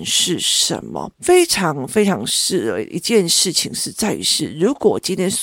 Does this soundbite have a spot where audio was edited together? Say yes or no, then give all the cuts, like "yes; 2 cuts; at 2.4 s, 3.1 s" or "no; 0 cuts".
yes; 1 cut; at 1.1 s